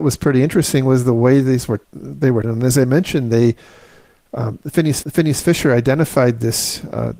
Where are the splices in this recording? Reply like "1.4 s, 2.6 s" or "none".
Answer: 1.8 s, 2.4 s, 5.0 s